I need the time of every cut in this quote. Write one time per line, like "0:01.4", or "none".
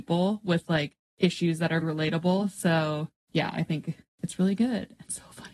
0:01.8